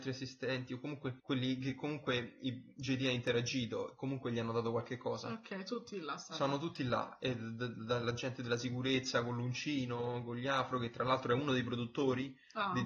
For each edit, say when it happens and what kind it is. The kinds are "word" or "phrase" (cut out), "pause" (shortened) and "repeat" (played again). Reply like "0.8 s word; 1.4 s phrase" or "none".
1.2 s pause